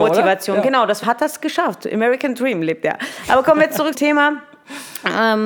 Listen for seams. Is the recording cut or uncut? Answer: cut